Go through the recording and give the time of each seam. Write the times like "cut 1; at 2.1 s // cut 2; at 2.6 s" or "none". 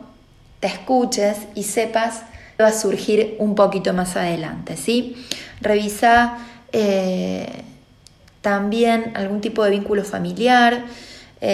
cut 1; at 2.6 s